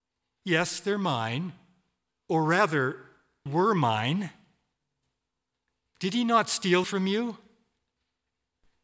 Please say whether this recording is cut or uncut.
cut